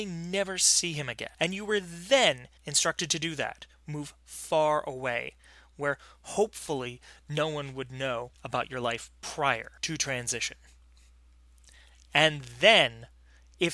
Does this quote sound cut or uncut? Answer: cut